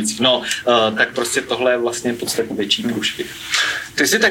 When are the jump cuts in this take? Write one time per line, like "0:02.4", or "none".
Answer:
0:02.5

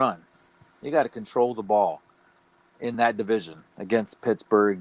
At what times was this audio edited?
none

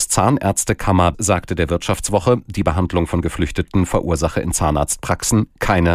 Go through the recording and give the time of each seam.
0:01.1

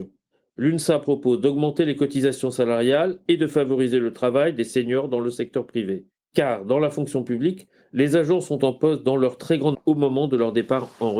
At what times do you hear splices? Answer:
0:09.7

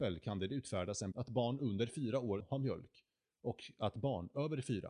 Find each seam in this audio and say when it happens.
0:01.1
0:02.4

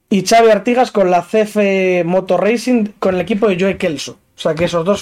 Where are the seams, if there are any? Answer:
none

